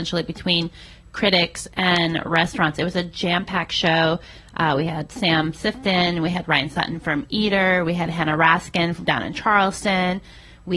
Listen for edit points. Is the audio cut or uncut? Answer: uncut